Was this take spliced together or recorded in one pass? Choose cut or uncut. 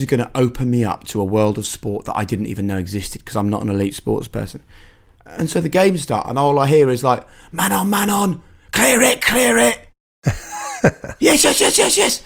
uncut